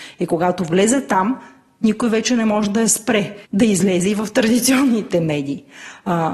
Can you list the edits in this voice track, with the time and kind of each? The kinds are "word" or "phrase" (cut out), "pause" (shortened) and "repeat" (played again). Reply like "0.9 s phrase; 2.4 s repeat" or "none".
3.4 s pause